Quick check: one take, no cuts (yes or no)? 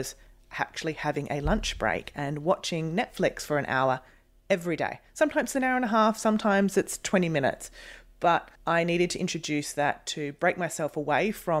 no